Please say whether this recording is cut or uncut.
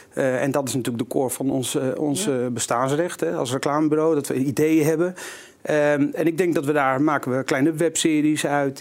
uncut